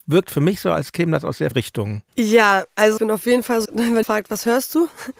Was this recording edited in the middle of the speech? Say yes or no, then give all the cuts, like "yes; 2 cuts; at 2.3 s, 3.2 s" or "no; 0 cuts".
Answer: yes; 5 cuts; at 1.5 s, 2.1 s, 3.0 s, 3.6 s, 4.0 s